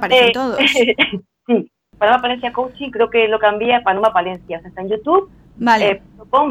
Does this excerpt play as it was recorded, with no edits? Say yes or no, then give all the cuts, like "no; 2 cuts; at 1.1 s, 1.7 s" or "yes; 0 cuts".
yes; 0 cuts